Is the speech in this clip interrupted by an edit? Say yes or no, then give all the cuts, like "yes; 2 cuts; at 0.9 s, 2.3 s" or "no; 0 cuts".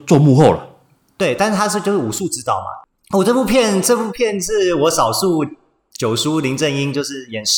no; 0 cuts